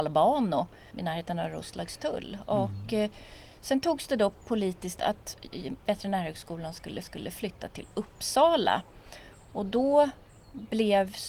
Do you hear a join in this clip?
yes; 4 cuts; at 0.9 s, 5.0 s, 5.8 s, 7.0 s

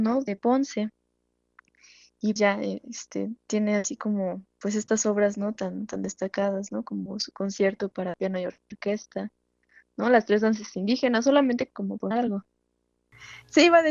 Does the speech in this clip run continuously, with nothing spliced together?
no; 3 cuts; at 2.4 s, 3.4 s, 12.1 s

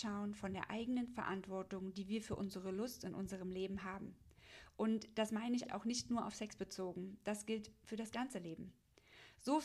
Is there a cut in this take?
yes; 1 cut; at 5.6 s

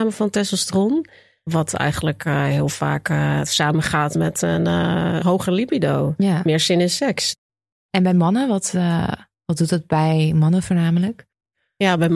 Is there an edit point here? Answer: no; 0 cuts

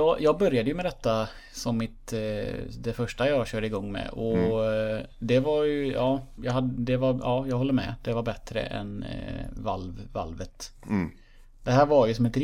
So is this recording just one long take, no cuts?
no; 1 cut; at 6.4 s

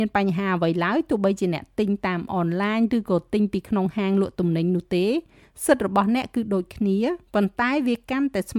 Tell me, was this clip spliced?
yes; 1 cut; at 7.2 s

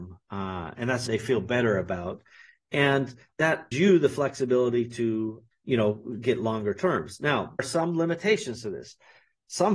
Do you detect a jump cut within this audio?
yes; 4 cuts; at 1.1 s, 3.7 s, 5.5 s, 7.6 s

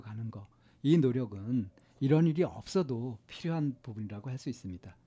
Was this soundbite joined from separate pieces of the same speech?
no; 0 cuts

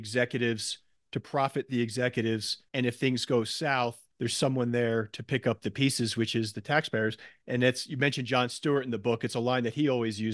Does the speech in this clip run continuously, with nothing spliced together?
no; 2 cuts; at 2.7 s, 4.1 s

